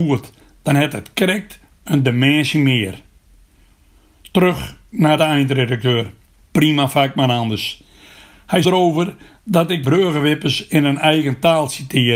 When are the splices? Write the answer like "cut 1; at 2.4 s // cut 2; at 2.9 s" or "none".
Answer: cut 1; at 5.2 s // cut 2; at 6.3 s // cut 3; at 8.6 s // cut 4; at 9.8 s

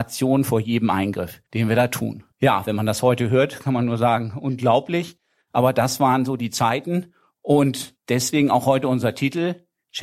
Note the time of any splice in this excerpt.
cut 1; at 1.5 s // cut 2; at 2.3 s // cut 3; at 8.0 s

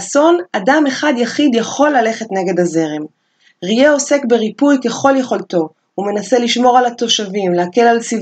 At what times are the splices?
none

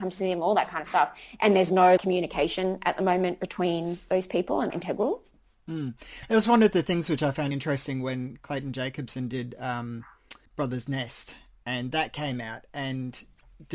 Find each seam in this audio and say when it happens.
cut 1; at 2.0 s // cut 2; at 4.7 s // cut 3; at 7.5 s // cut 4; at 10.5 s

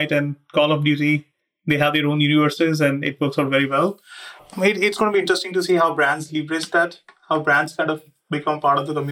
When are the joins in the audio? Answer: none

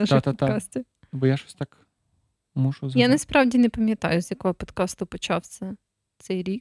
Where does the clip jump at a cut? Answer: none

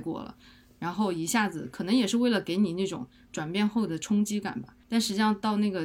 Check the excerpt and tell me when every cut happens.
cut 1; at 4.8 s

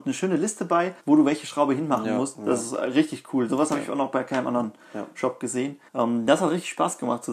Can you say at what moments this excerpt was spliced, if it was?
cut 1; at 1.0 s // cut 2; at 5.9 s

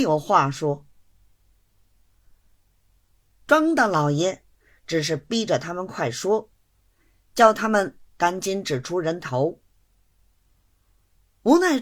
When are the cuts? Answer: none

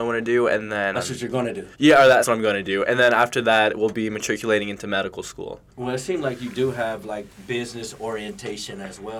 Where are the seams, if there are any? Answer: cut 1; at 0.9 s // cut 2; at 1.7 s // cut 3; at 2.2 s

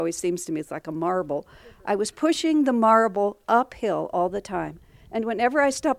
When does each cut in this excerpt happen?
none

